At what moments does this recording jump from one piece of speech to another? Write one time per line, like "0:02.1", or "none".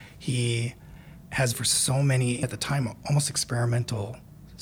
0:01.5
0:02.4